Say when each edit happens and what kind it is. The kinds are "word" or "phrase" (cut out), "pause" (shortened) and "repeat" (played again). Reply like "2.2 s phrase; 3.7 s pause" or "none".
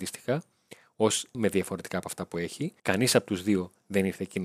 1.3 s word; 1.9 s word; 2.8 s pause